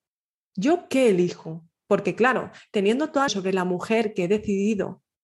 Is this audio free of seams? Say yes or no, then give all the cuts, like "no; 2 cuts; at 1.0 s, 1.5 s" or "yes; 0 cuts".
no; 1 cut; at 3.3 s